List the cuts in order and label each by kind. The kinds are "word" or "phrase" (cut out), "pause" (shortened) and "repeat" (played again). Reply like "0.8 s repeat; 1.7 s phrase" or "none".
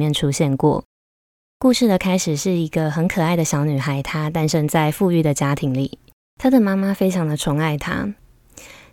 none